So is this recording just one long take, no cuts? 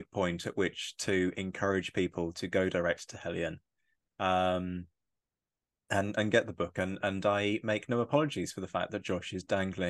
yes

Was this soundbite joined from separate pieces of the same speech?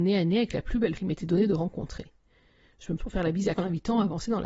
yes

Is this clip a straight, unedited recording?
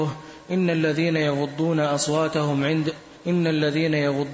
yes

